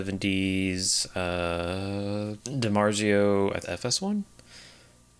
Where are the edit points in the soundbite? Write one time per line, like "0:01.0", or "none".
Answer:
0:02.4
0:03.6